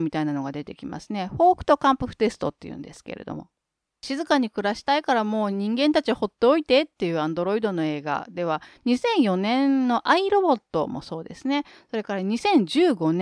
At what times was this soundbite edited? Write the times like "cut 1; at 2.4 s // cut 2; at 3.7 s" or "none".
none